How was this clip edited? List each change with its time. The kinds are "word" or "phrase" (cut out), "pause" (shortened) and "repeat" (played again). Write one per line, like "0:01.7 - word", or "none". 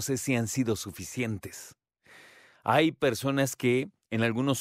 none